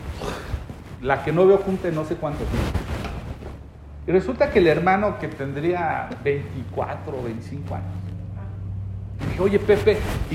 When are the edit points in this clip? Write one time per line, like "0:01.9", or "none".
none